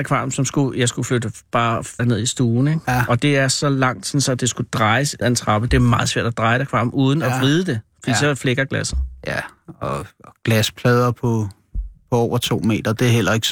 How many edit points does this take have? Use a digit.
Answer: 2